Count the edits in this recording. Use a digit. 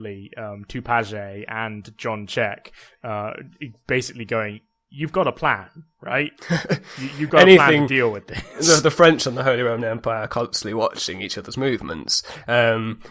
0